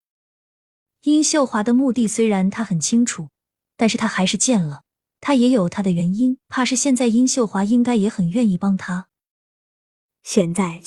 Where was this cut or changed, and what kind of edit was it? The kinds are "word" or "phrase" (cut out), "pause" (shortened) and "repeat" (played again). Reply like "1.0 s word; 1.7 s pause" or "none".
6.4 s pause